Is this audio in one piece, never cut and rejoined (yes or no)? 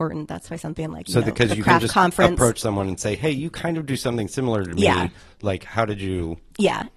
yes